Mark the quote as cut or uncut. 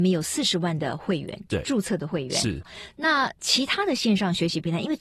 uncut